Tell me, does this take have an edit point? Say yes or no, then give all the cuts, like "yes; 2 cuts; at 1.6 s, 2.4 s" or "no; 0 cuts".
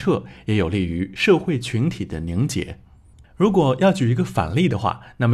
no; 0 cuts